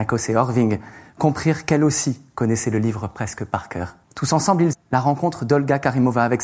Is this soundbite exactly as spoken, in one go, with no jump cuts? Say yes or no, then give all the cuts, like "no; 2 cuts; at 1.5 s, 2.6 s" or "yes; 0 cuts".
no; 2 cuts; at 4.0 s, 4.7 s